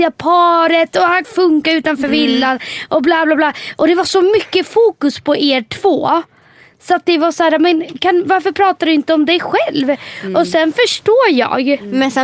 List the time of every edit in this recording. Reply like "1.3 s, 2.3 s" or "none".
1.2 s